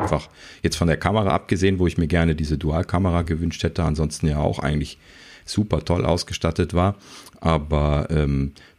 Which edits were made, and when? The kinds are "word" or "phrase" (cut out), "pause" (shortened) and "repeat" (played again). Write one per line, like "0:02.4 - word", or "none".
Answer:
none